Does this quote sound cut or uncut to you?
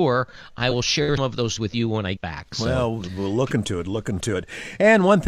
cut